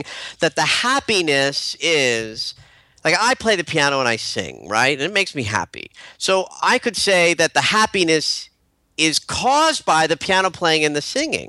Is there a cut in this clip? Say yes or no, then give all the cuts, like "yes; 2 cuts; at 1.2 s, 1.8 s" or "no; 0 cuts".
no; 0 cuts